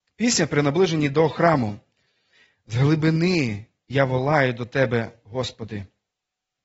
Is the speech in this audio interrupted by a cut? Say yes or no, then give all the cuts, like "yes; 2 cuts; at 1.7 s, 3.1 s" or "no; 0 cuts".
no; 0 cuts